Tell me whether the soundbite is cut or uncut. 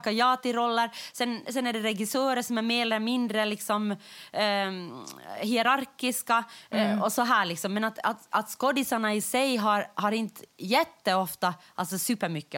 uncut